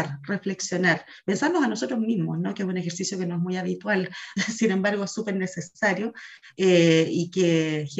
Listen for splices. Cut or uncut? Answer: uncut